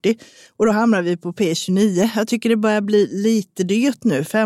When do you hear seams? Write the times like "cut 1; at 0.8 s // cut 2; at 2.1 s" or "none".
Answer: none